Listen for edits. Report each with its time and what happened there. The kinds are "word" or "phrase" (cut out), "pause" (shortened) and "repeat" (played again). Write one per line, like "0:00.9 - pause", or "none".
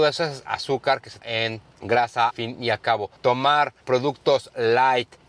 0:01.2 - word
0:02.3 - word
0:03.2 - pause

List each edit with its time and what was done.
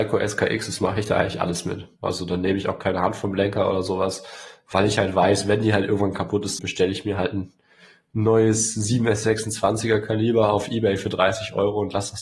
0:06.6 - word

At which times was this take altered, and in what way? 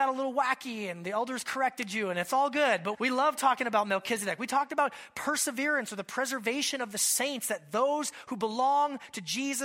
0:02.9 - word

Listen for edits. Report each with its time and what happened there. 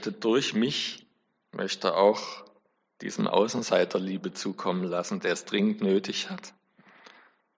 none

